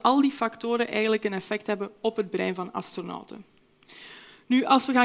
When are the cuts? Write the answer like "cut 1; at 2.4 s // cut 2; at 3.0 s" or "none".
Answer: none